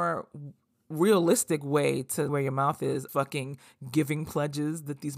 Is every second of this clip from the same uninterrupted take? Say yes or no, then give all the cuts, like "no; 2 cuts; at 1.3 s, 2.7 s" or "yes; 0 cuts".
no; 2 cuts; at 2.3 s, 3.1 s